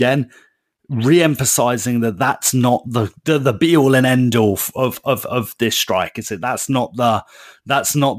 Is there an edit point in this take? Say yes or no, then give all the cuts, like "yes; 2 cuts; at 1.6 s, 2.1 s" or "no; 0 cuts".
no; 0 cuts